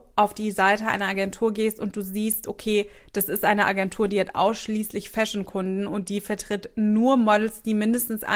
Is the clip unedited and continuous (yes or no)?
yes